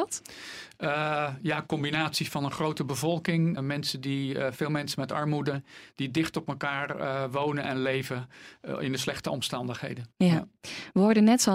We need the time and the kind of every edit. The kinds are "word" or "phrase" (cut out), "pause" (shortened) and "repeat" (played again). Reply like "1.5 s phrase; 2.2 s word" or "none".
3.6 s word; 10.1 s pause; 10.6 s pause